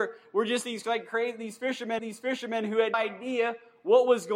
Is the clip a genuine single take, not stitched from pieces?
no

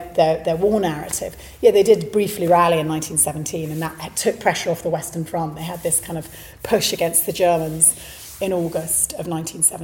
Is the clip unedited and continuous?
yes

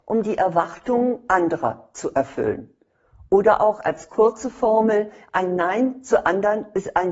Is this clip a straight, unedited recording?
yes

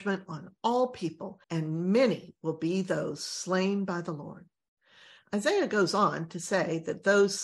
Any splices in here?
yes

